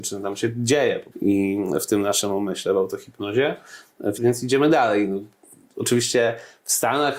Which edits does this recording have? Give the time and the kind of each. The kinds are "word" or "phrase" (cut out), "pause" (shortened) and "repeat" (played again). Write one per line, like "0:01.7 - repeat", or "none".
0:01.1 - word
0:04.2 - word